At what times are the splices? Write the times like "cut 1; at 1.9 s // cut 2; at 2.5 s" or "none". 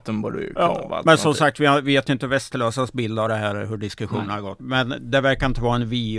cut 1; at 4.6 s